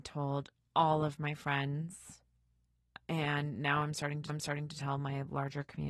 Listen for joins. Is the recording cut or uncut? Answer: cut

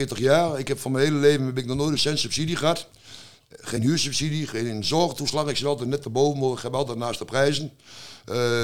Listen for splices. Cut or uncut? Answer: uncut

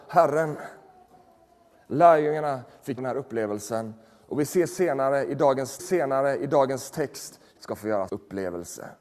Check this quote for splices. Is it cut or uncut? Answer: cut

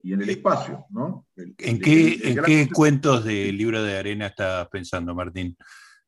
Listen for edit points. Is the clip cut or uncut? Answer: uncut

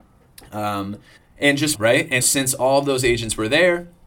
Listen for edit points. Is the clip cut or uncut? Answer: cut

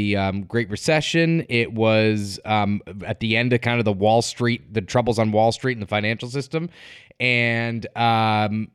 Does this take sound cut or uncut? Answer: uncut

